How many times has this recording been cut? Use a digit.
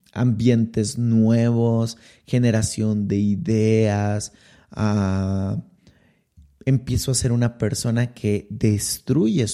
0